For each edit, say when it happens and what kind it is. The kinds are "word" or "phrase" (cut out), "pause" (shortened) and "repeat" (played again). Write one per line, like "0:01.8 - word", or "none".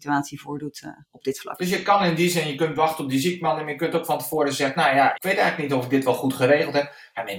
0:01.0 - pause
0:05.1 - word